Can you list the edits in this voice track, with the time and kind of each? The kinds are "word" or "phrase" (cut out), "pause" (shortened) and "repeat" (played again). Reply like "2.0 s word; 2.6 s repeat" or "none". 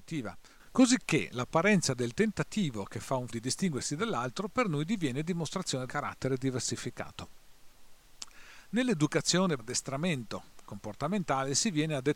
3.3 s word; 5.9 s word; 9.6 s word